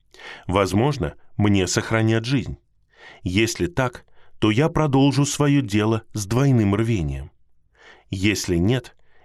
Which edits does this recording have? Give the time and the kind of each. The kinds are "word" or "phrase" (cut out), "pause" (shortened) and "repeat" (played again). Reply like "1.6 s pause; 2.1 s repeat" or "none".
none